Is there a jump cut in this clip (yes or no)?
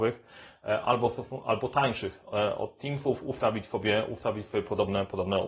no